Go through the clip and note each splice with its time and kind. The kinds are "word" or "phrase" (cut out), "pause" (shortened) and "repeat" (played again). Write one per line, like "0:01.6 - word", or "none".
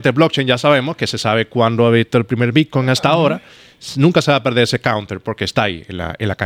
none